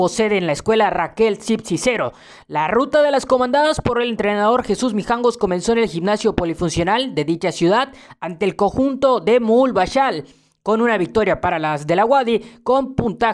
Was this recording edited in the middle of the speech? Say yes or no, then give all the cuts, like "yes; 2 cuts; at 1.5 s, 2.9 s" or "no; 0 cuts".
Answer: no; 0 cuts